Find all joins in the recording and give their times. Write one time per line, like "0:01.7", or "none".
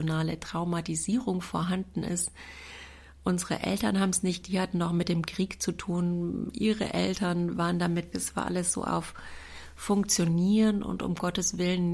0:04.4
0:08.1